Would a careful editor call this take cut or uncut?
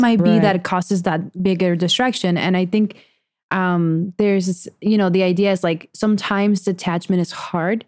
uncut